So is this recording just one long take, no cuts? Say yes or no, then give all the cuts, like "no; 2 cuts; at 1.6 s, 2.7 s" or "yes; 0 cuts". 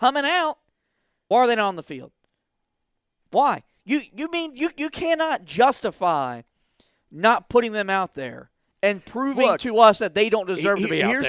no; 1 cut; at 1.3 s